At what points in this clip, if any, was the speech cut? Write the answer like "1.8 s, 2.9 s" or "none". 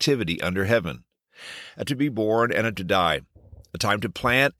1.9 s, 2.7 s